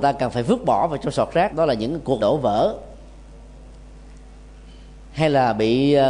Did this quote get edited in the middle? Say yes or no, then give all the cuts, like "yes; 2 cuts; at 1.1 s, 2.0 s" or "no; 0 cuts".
yes; 2 cuts; at 1.5 s, 2.2 s